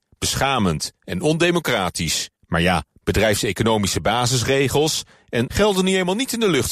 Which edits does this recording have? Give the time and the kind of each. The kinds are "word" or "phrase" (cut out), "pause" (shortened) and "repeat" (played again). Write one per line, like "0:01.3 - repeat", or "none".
0:02.4 - pause
0:05.5 - phrase